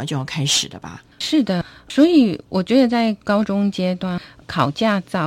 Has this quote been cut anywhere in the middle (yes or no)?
yes